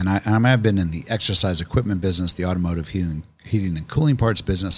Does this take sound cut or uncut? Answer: uncut